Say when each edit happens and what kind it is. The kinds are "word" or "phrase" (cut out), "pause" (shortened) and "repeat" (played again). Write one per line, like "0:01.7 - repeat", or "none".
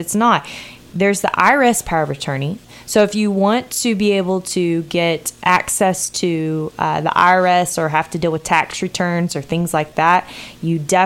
none